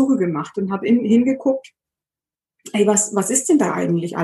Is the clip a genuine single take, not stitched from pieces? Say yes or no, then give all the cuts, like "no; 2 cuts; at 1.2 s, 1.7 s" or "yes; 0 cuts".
yes; 0 cuts